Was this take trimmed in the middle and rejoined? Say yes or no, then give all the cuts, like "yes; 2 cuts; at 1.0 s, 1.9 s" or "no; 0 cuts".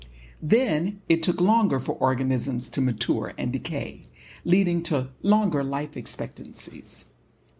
no; 0 cuts